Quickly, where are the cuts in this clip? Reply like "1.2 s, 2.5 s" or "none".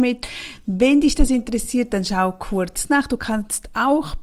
none